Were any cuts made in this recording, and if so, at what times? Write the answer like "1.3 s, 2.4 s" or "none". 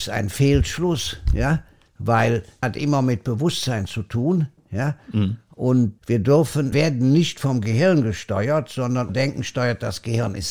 2.6 s, 6.0 s, 6.7 s, 9.1 s